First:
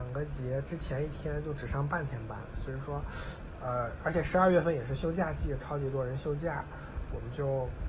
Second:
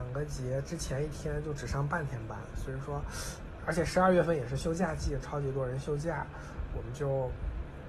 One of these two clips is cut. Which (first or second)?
second